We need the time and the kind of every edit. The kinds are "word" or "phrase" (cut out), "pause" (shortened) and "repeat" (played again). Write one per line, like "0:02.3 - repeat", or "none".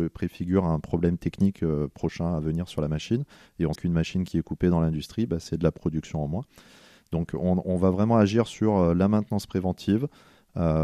0:03.8 - word